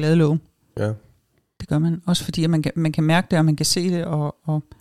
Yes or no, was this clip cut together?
no